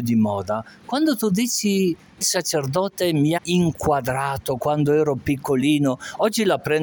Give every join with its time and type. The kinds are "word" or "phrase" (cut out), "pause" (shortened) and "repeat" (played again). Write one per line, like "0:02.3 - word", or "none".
0:02.2 - word
0:03.4 - word

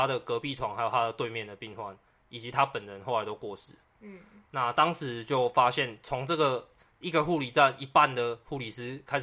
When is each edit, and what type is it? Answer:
none

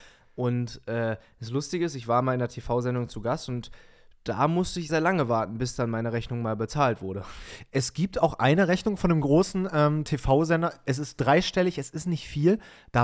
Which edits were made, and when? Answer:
0:04.9 - word

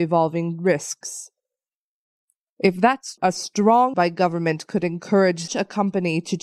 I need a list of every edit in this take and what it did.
0:03.2 - word
0:03.9 - word
0:05.5 - word

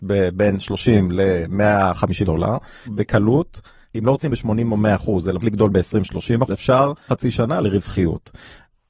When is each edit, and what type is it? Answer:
0:02.2 - word
0:02.9 - word
0:04.3 - word
0:05.4 - word
0:06.5 - word
0:07.1 - word
0:07.6 - word

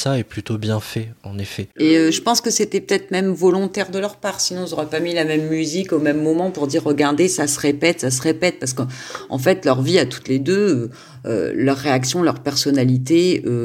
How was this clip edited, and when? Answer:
0:01.7 - pause

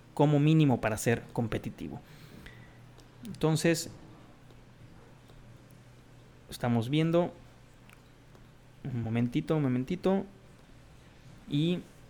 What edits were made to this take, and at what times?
none

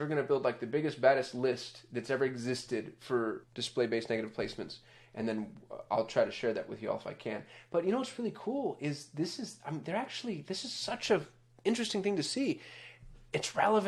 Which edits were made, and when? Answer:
none

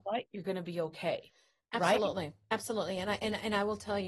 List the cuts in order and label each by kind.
none

